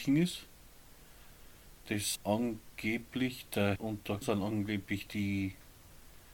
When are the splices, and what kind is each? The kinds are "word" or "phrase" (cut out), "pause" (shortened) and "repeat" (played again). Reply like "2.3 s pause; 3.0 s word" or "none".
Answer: 2.1 s word; 3.8 s word; 4.2 s word